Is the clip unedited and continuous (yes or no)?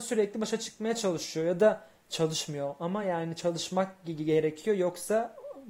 yes